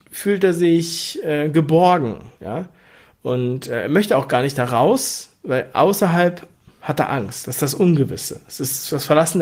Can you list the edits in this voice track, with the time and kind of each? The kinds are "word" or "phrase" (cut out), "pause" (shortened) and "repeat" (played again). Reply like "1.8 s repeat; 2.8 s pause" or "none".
none